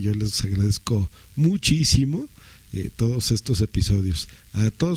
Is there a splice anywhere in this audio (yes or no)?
no